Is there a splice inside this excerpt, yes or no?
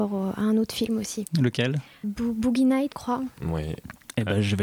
yes